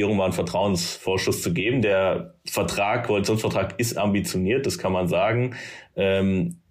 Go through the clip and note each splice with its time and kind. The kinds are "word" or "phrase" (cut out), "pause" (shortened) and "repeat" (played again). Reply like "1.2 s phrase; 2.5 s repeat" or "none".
none